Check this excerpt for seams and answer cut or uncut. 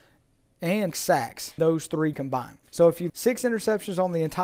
cut